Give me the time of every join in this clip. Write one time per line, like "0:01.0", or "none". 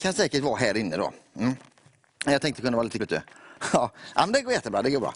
0:02.5
0:03.0